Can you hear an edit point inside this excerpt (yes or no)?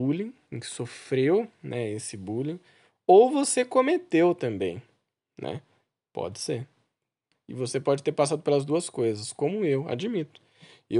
no